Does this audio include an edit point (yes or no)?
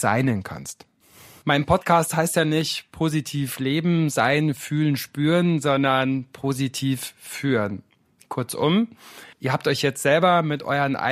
yes